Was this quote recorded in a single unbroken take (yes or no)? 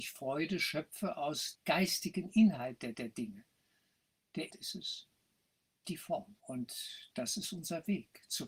no